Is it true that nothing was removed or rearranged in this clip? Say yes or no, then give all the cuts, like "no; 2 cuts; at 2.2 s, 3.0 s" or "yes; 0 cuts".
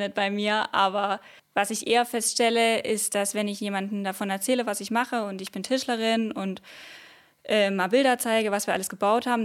no; 1 cut; at 1.4 s